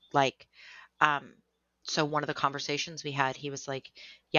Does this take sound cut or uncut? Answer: uncut